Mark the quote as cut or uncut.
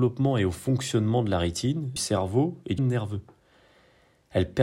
cut